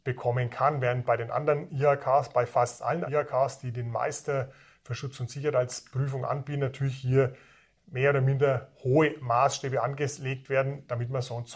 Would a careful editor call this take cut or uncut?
cut